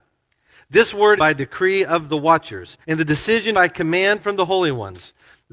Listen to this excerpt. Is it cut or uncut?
cut